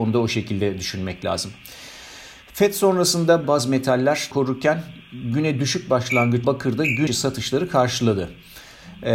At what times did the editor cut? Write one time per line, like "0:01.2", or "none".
0:03.4
0:04.3
0:06.4
0:07.1